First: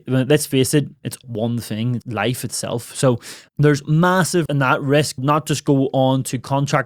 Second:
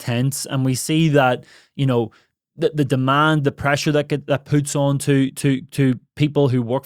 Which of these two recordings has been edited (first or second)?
first